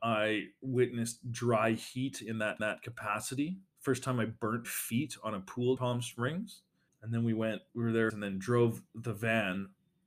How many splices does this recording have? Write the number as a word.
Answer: six